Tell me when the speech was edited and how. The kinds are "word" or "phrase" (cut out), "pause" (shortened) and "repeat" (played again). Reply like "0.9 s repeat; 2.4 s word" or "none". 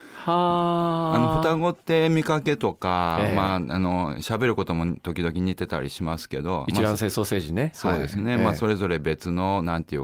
none